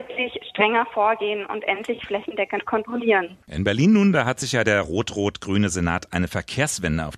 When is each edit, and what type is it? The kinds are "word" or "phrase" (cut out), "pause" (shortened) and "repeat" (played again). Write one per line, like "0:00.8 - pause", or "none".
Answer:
0:03.4 - pause